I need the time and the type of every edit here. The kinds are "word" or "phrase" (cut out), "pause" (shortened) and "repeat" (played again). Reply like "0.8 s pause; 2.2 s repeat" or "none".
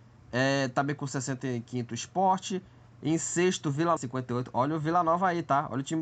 4.0 s word